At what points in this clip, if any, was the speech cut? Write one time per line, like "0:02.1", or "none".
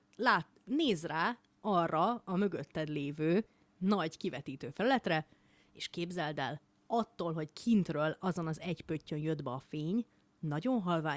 none